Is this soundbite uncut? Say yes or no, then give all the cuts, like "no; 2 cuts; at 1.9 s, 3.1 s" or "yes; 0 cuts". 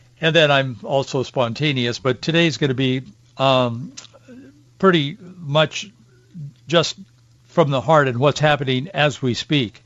yes; 0 cuts